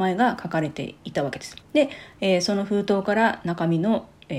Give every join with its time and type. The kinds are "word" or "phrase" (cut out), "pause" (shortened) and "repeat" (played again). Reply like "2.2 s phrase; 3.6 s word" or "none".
1.6 s pause